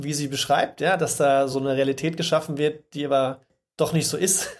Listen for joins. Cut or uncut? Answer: uncut